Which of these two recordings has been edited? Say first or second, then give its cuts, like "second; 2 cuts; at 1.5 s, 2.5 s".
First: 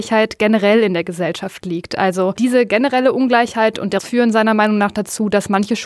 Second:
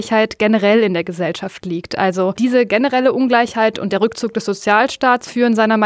first; 1 cut; at 4.0 s